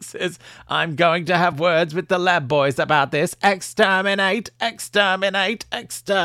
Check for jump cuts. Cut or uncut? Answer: uncut